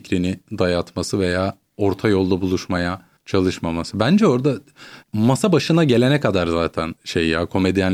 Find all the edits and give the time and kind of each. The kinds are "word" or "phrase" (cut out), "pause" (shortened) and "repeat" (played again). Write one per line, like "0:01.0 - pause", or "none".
0:01.7 - pause
0:03.2 - pause
0:05.0 - pause
0:07.0 - pause